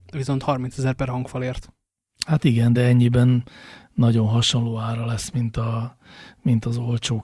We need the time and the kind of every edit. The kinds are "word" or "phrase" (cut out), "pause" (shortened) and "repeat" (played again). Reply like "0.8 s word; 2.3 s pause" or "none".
none